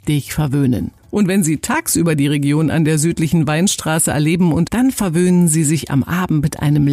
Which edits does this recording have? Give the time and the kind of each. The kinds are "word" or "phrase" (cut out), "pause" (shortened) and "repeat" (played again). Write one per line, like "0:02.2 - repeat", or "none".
0:01.0 - pause
0:04.7 - word